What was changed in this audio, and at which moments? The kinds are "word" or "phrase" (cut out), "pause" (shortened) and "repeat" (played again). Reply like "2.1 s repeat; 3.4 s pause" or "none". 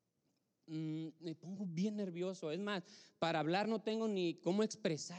none